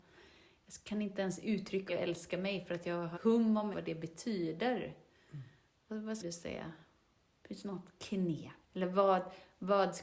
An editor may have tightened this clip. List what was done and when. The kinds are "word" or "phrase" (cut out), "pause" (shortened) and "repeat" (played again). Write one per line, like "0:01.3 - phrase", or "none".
0:01.9 - word
0:03.1 - word
0:03.7 - word
0:06.2 - word
0:08.6 - word